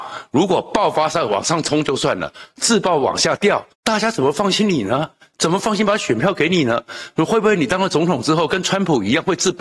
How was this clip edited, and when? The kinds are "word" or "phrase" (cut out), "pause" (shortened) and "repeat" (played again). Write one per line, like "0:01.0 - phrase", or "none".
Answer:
0:03.7 - pause